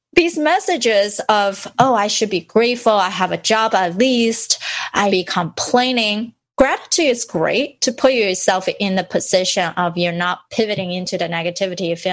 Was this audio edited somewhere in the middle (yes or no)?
yes